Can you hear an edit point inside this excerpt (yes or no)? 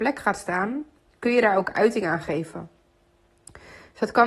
no